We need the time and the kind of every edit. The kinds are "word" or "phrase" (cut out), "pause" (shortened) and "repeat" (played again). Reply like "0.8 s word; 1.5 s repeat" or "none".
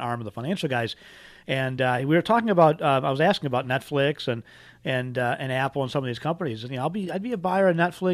none